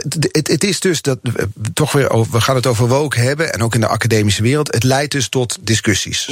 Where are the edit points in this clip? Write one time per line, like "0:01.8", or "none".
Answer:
none

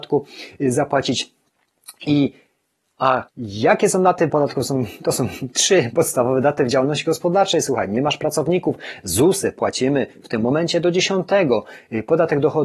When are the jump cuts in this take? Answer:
0:03.3
0:04.3

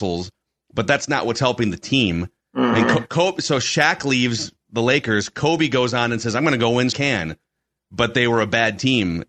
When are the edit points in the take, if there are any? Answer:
0:06.9

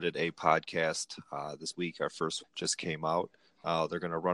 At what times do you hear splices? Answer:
0:01.7
0:02.4

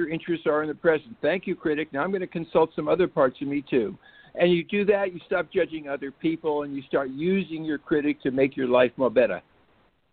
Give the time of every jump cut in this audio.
none

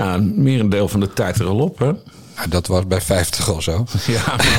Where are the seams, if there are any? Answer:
0:01.3

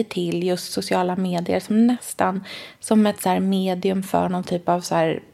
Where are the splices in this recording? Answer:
none

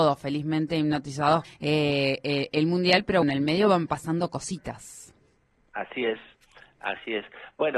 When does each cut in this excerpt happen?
0:01.4
0:03.2

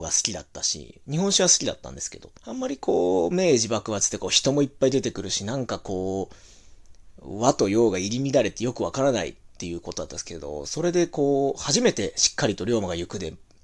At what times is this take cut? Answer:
0:02.4

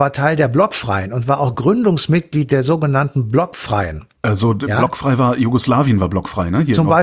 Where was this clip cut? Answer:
none

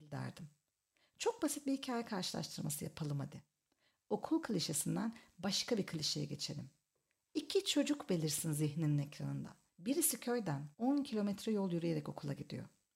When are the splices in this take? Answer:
0:09.7
0:10.7

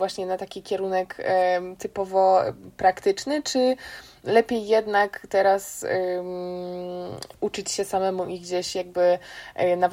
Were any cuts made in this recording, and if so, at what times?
none

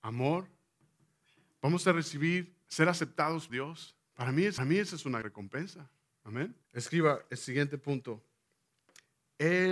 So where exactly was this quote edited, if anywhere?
0:02.6
0:03.5
0:04.1
0:04.6
0:05.2
0:06.6

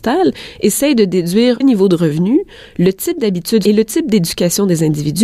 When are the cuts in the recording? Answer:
0:01.6
0:03.7

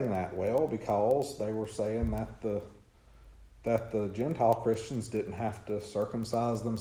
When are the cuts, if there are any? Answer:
none

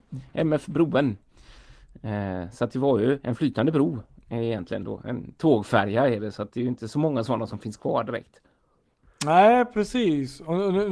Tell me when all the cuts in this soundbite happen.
none

